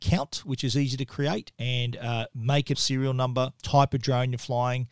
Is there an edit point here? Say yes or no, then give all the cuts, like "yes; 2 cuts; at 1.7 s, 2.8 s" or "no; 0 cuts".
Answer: yes; 2 cuts; at 1.5 s, 2.7 s